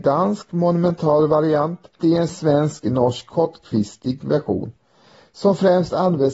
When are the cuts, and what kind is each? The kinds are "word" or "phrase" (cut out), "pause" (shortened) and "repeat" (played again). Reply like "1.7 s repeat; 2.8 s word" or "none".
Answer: 2.0 s word